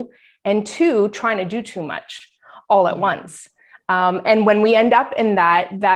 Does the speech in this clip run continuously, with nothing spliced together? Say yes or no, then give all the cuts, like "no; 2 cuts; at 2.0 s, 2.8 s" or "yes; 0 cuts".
yes; 0 cuts